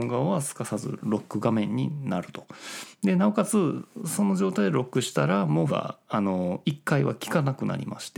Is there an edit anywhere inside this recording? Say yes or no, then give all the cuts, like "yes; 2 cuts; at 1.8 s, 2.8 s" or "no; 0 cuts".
yes; 1 cut; at 5.7 s